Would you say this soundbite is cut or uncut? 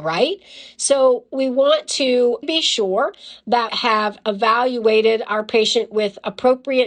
cut